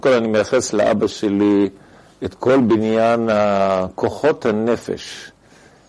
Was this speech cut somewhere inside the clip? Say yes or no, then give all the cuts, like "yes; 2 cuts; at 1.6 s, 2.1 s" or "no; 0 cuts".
no; 0 cuts